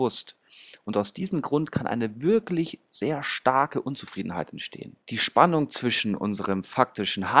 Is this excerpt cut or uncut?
cut